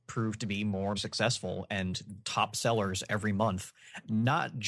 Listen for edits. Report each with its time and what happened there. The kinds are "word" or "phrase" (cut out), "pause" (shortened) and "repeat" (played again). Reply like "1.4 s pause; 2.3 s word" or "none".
0.9 s word; 2.2 s word